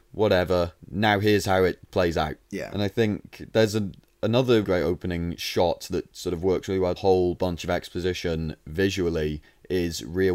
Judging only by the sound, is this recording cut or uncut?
cut